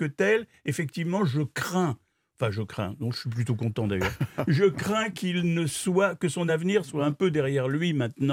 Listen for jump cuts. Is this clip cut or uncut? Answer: uncut